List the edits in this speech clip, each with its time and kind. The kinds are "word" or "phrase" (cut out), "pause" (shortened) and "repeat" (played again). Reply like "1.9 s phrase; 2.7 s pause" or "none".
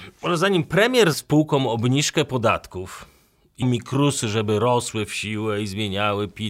1.1 s word; 3.6 s word